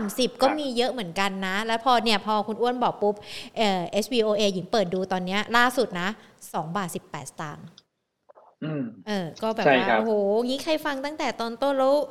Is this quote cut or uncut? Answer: uncut